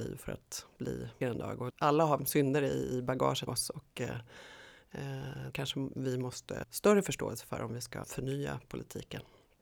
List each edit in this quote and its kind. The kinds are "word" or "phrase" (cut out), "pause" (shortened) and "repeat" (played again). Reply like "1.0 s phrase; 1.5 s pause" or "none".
1.2 s word; 1.7 s word; 2.2 s word; 3.5 s word; 5.5 s word; 6.6 s word; 8.0 s word